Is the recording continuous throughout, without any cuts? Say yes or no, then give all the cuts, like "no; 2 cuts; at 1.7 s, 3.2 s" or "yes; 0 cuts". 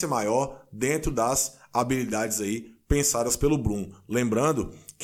yes; 0 cuts